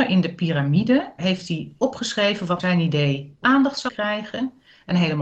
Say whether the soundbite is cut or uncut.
cut